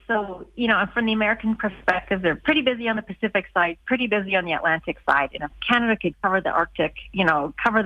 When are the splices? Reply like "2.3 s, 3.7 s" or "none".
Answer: 6.1 s